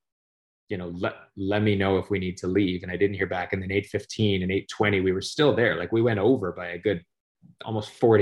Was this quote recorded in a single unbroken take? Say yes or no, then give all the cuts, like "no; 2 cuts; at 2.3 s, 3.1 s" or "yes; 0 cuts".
yes; 0 cuts